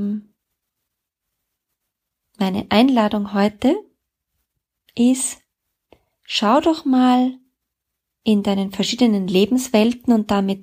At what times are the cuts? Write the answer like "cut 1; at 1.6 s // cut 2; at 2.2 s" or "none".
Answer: none